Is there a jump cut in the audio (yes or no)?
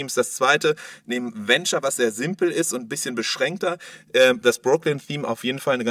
no